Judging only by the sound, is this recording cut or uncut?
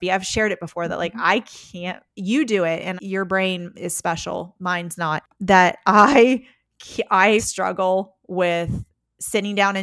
cut